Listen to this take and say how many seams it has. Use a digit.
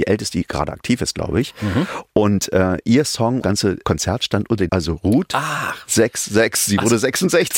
3